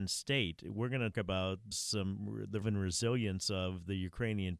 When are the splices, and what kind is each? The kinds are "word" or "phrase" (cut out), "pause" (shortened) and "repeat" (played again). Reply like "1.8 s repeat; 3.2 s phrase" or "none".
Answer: 1.1 s word; 1.7 s word; 2.6 s word